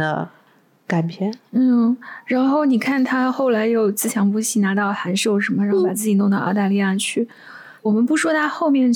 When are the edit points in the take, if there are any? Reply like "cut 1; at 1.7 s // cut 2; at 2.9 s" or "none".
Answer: cut 1; at 7.8 s